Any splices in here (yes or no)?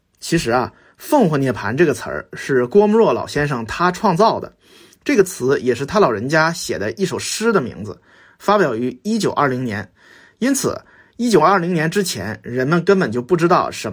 no